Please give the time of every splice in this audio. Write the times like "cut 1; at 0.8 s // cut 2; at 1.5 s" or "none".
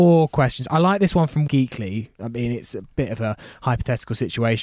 cut 1; at 1.5 s